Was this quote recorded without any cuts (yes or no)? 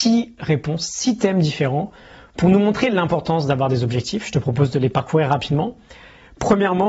yes